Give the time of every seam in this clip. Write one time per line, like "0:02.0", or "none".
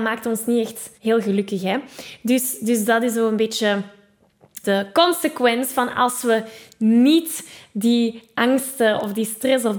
0:01.0
0:04.6